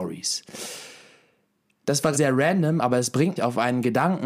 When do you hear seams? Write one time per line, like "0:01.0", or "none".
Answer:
0:02.1
0:03.4

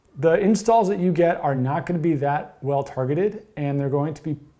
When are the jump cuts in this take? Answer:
none

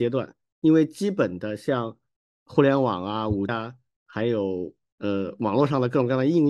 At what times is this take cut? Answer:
0:03.5

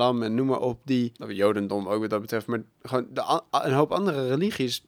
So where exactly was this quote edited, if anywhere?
0:01.2

